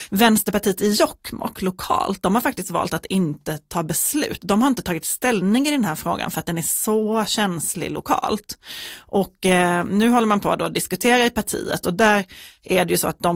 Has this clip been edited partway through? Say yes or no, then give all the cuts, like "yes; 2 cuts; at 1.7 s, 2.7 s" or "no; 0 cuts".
no; 0 cuts